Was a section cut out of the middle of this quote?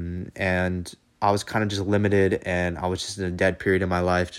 no; 0 cuts

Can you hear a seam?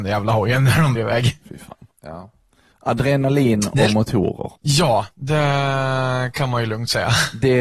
yes; 3 cuts; at 1.0 s, 1.9 s, 4.6 s

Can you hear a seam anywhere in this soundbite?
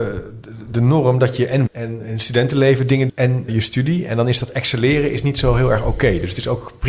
yes; 3 cuts; at 1.7 s, 3.1 s, 3.5 s

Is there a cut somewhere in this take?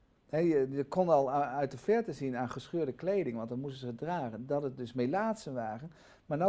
no; 0 cuts

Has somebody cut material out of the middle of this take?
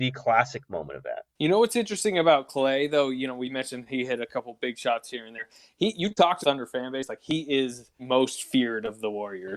yes; 2 cuts; at 6.4 s, 8.0 s

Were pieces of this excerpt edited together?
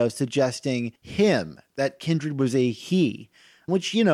yes; 1 cut; at 1.0 s

